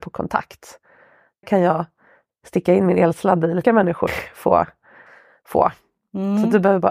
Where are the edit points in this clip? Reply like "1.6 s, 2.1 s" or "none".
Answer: 1.4 s, 3.6 s, 4.1 s